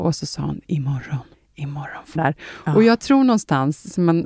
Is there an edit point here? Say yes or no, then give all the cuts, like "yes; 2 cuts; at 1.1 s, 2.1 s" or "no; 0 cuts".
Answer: yes; 2 cuts; at 1.3 s, 2.1 s